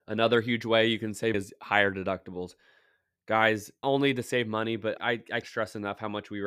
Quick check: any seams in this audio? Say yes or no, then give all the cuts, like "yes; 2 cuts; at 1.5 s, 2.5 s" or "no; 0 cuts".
yes; 4 cuts; at 1.3 s, 3.8 s, 5.0 s, 5.4 s